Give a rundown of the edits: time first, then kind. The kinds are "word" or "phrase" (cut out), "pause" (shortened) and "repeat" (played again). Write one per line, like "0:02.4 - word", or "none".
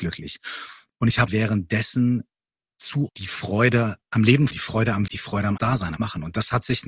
0:01.3 - word
0:03.1 - word
0:04.5 - word
0:05.1 - word
0:05.6 - word
0:06.0 - word